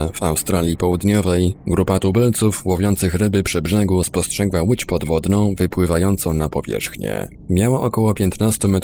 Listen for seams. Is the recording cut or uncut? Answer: uncut